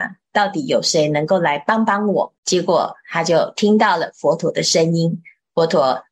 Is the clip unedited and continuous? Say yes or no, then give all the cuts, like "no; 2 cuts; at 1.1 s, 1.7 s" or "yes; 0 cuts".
no; 1 cut; at 2.4 s